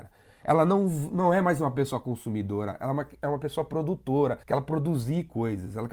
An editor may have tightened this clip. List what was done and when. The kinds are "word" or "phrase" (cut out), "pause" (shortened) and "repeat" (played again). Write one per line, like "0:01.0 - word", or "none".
0:04.4 - pause

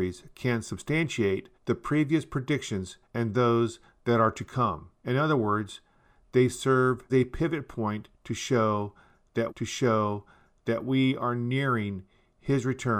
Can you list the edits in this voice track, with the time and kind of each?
0:01.5 - pause
0:03.0 - pause
0:05.0 - pause
0:07.1 - word
0:09.5 - repeat

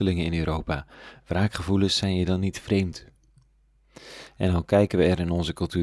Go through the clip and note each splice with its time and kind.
none

